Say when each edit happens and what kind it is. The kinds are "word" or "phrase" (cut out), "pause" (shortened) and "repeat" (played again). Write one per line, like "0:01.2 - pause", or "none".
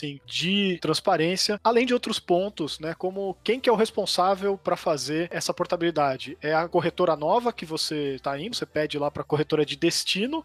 0:08.5 - word